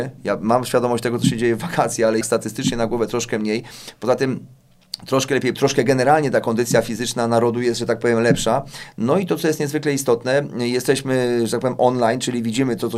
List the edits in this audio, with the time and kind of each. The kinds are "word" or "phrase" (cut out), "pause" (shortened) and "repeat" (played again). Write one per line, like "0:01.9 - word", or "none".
0:02.2 - word
0:05.5 - word